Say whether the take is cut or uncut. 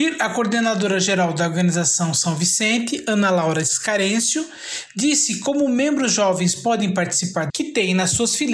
cut